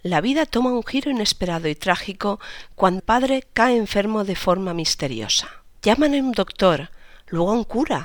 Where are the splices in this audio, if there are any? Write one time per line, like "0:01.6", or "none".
0:03.0
0:05.8